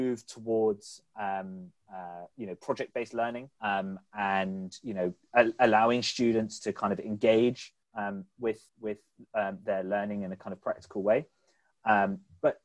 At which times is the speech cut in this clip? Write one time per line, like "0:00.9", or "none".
0:01.8
0:03.5
0:07.8
0:08.7